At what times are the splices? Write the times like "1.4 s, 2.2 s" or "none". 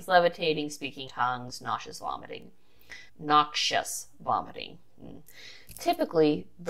1.1 s, 3.1 s